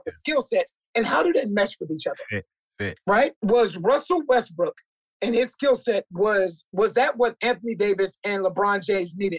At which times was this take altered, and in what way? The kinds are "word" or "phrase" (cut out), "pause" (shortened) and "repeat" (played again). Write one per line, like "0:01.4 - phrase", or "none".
0:03.3 - pause